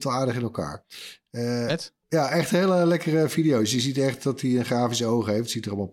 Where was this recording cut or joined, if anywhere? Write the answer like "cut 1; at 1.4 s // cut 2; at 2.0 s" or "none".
cut 1; at 2.0 s